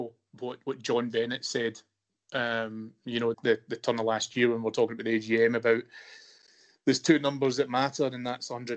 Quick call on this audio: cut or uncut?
cut